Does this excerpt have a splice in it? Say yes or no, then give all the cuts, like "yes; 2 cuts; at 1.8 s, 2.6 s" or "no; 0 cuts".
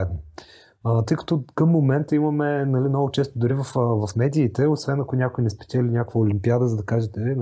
no; 0 cuts